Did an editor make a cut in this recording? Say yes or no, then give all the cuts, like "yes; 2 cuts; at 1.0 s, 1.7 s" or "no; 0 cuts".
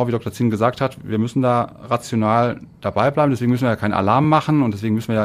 no; 0 cuts